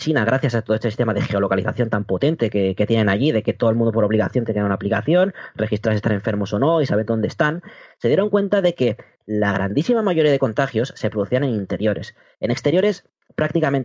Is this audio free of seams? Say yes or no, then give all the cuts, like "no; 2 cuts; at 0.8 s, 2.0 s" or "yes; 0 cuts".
yes; 0 cuts